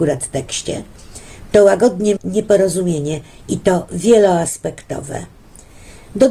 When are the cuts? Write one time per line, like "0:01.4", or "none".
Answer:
0:02.2